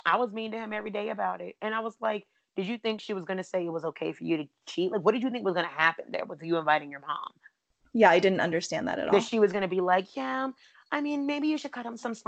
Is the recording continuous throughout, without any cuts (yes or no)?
yes